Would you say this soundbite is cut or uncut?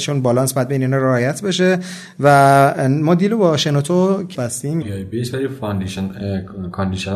cut